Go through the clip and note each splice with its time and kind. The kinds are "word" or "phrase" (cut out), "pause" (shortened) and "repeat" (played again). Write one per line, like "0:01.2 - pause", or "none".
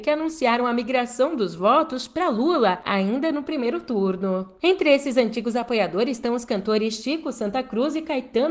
none